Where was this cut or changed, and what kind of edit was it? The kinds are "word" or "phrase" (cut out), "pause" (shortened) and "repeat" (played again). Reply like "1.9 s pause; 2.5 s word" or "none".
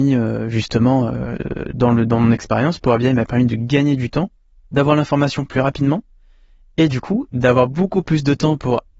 none